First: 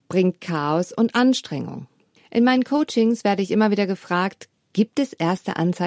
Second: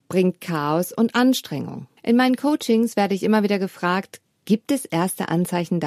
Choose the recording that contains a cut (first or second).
second